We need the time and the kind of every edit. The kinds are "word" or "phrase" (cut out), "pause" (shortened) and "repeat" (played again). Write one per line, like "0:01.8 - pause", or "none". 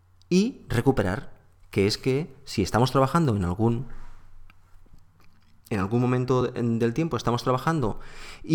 none